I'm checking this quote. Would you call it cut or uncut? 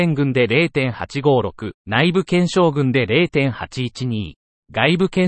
cut